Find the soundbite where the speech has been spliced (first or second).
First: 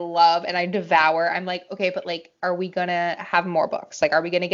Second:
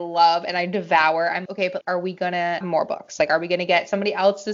second